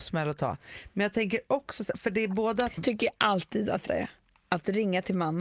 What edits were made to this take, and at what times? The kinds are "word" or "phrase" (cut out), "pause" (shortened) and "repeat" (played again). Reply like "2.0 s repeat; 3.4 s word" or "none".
2.8 s phrase; 3.9 s word